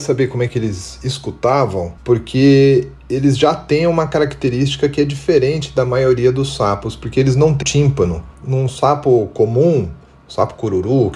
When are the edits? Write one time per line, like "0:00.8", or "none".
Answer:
0:02.0
0:07.6